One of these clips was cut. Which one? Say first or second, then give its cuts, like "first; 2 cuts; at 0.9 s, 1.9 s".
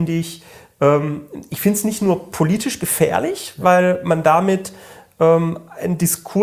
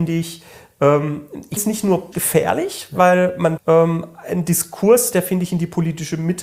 second; 3 cuts; at 1.6 s, 2.1 s, 3.6 s